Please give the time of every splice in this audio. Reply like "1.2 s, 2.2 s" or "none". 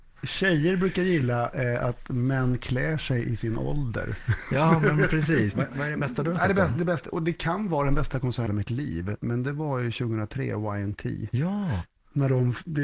8.5 s